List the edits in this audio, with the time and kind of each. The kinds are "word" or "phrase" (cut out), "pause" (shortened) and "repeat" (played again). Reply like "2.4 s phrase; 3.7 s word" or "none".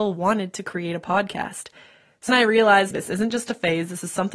2.3 s word; 2.9 s word

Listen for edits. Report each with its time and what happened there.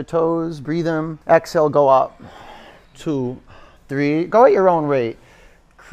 1.2 s pause

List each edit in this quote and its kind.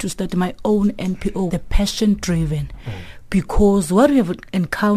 1.5 s word

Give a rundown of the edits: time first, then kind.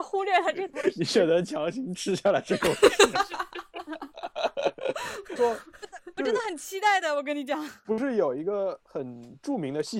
3.1 s word; 5.4 s word

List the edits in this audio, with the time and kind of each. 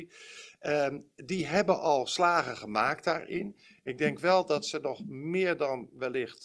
none

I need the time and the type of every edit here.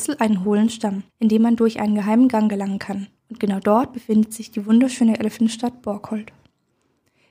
1.1 s pause; 3.2 s pause

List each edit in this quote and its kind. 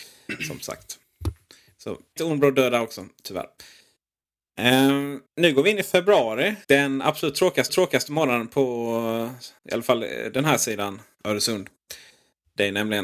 2.2 s word; 5.3 s pause; 6.6 s pause; 7.7 s repeat; 9.6 s pause; 11.2 s word

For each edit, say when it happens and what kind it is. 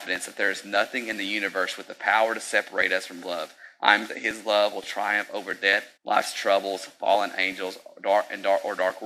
3.2 s word; 4.1 s word; 6.0 s pause

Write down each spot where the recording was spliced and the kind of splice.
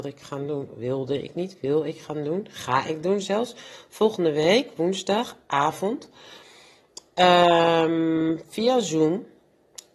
none

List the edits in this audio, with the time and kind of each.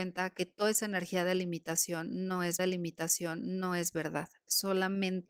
2.6 s repeat

